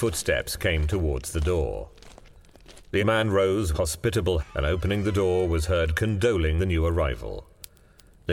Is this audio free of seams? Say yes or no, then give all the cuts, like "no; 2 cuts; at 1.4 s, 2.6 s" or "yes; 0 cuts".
no; 4 cuts; at 3.0 s, 3.7 s, 4.4 s, 6.6 s